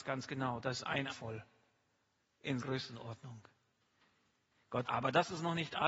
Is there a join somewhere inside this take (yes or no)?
yes